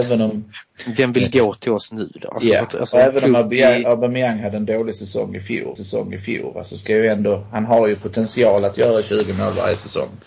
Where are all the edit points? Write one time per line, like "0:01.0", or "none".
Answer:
0:05.8